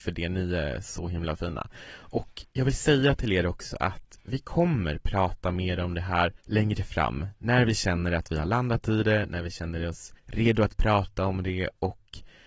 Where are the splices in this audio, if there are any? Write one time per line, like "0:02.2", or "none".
0:02.5
0:06.4
0:10.2